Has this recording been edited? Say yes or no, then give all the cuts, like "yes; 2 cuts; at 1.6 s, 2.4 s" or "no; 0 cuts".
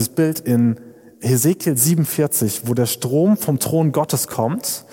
no; 0 cuts